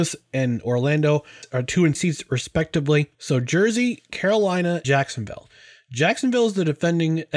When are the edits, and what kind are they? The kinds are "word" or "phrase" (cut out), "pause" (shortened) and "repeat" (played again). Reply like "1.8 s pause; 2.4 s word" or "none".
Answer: 1.9 s word; 3.1 s pause; 4.8 s word